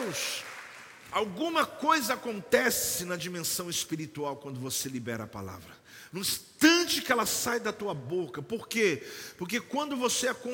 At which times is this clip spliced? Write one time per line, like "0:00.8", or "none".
none